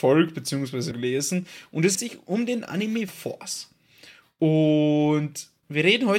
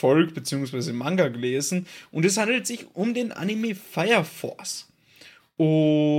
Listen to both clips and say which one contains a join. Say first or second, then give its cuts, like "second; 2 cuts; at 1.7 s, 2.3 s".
first; 3 cuts; at 0.9 s, 1.9 s, 3.1 s